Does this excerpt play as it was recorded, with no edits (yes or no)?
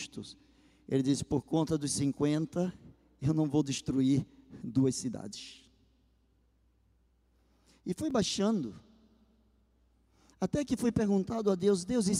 yes